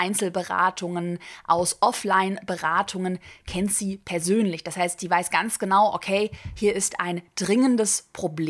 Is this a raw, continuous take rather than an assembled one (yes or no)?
yes